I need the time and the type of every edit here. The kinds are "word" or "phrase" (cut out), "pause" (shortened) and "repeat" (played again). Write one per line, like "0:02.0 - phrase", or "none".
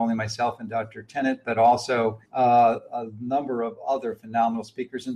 0:02.2 - pause